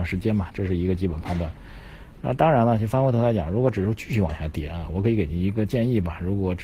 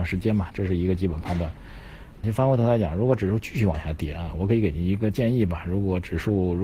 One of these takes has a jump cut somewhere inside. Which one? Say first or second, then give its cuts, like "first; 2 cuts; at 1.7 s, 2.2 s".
second; 1 cut; at 2.2 s